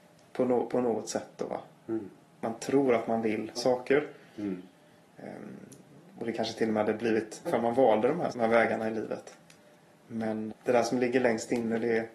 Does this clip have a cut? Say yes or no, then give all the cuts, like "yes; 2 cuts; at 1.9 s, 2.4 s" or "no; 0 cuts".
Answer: yes; 4 cuts; at 3.6 s, 7.5 s, 8.3 s, 10.5 s